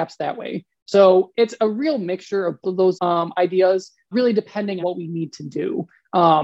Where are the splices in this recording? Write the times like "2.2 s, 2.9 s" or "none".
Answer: 2.6 s, 3.0 s, 4.1 s, 4.8 s

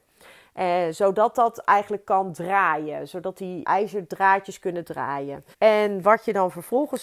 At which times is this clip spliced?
3.6 s, 5.5 s

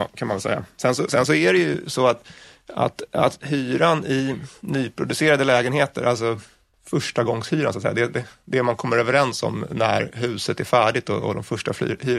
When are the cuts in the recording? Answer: none

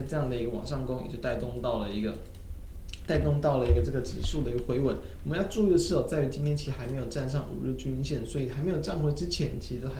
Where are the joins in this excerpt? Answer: 3.1 s

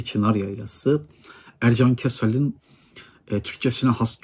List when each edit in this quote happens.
none

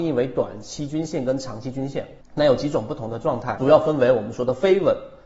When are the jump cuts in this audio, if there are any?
2.2 s

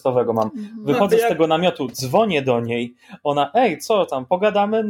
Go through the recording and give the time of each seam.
none

